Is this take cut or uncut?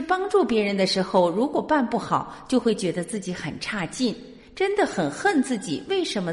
uncut